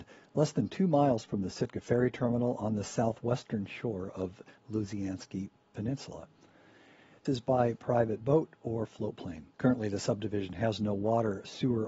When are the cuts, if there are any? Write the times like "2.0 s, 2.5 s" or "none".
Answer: 7.3 s, 9.5 s